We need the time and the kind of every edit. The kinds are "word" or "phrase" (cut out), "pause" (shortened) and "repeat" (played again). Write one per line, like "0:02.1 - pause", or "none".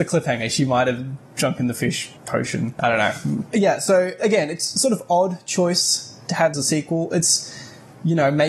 0:02.2 - pause
0:04.2 - word
0:06.5 - phrase